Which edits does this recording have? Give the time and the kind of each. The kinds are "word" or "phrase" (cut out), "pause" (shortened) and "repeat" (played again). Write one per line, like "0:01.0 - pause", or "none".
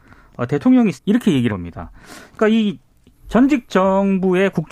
0:00.9 - word
0:01.5 - word